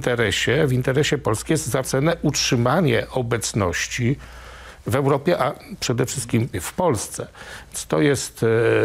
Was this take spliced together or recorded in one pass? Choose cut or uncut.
cut